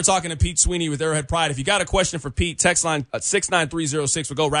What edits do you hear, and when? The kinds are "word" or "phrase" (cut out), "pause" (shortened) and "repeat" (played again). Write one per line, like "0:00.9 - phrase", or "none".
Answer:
0:03.1 - pause